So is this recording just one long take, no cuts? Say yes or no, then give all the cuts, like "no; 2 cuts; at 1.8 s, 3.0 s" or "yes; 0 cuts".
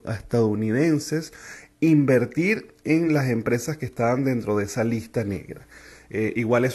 yes; 0 cuts